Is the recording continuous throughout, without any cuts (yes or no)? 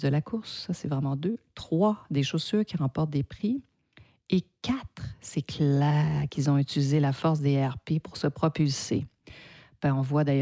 yes